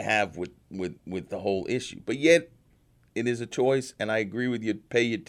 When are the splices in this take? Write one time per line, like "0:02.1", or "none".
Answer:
none